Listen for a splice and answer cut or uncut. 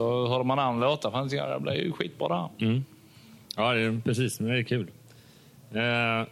cut